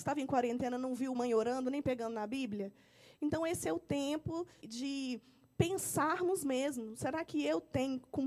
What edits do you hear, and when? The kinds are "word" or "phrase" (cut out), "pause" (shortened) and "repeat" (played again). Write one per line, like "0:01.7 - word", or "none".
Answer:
0:01.1 - phrase
0:04.6 - word